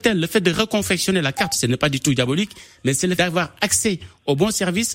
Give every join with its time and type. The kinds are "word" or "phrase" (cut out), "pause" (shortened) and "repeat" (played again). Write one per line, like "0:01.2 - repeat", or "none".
0:03.2 - word